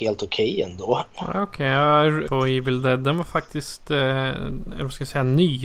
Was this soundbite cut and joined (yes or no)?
yes